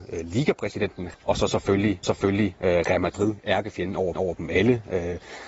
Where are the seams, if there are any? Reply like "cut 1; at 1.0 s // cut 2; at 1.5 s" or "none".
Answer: cut 1; at 1.1 s // cut 2; at 2.0 s // cut 3; at 4.1 s